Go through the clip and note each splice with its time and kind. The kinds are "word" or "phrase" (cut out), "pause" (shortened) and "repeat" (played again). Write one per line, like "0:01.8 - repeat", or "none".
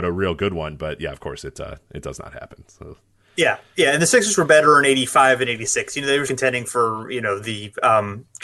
0:06.3 - word

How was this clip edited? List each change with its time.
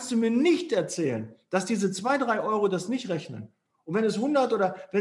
none

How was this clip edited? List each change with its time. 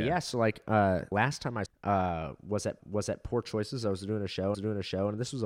0:01.1 - word
0:01.7 - word
0:02.8 - repeat
0:04.5 - repeat

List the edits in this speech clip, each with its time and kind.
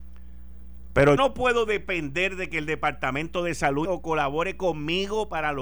0:01.2 - word
0:03.8 - word

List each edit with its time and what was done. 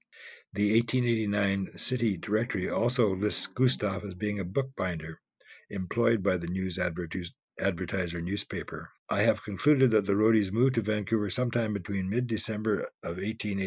0:09.0 - pause

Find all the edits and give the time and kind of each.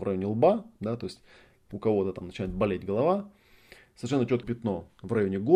0:04.4 - word

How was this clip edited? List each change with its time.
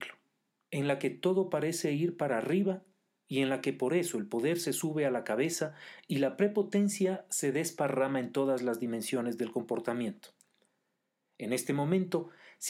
none

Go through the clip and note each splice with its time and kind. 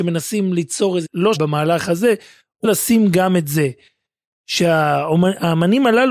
0:01.0 - word
0:01.3 - phrase
0:02.6 - word

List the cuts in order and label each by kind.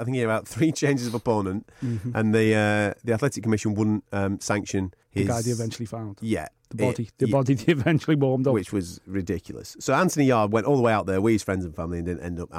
0:05.0 - pause

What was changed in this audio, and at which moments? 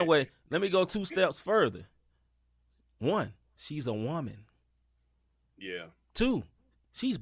none

